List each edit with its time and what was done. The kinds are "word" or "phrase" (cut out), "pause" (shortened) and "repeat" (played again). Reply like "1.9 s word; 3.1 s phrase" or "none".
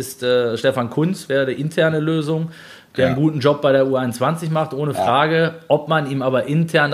none